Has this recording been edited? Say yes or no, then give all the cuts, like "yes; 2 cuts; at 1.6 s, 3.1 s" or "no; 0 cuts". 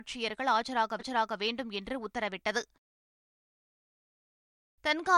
yes; 1 cut; at 1.0 s